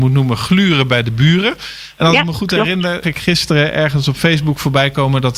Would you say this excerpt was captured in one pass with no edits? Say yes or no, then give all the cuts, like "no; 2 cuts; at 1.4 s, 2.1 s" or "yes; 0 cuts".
no; 1 cut; at 3.0 s